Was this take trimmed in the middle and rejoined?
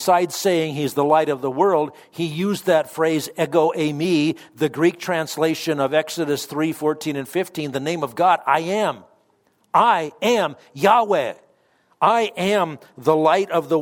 no; 0 cuts

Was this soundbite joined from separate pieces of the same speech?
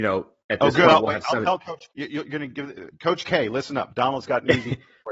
yes; 1 cut; at 1.9 s

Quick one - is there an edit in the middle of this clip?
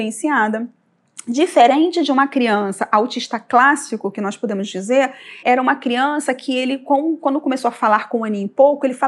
yes; 1 cut; at 5.4 s

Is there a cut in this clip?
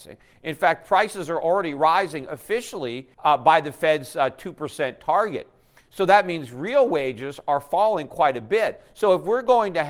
yes; 1 cut; at 3.1 s

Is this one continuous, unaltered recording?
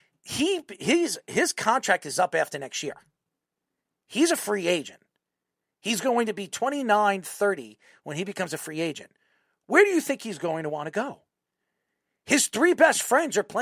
yes; 0 cuts

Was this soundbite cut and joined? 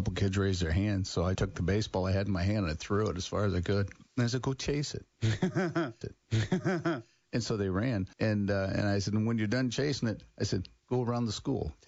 yes; 5 cuts; at 1.4 s, 4.1 s, 6.0 s, 8.1 s, 10.8 s

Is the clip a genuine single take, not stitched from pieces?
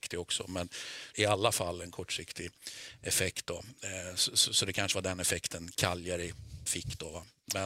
no; 1 cut; at 1.1 s

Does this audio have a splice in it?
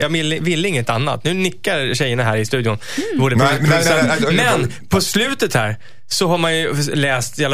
no; 0 cuts

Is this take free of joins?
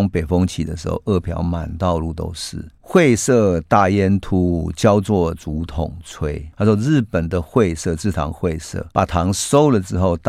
no; 3 cuts; at 2.8 s, 6.5 s, 8.9 s

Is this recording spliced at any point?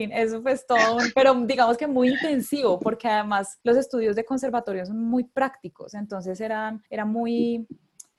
yes; 2 cuts; at 3.6 s, 6.9 s

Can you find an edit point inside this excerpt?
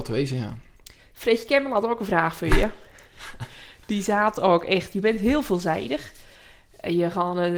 no; 0 cuts

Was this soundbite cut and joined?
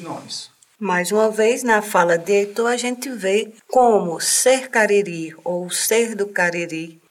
no; 0 cuts

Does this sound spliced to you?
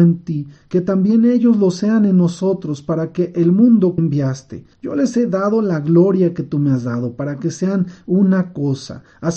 yes; 2 cuts; at 4.0 s, 4.7 s

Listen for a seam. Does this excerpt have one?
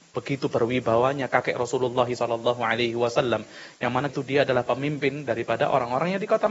yes; 1 cut; at 4.1 s

